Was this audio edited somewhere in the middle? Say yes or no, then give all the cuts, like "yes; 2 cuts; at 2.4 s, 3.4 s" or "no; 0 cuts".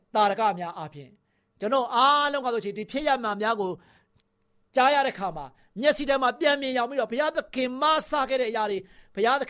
no; 0 cuts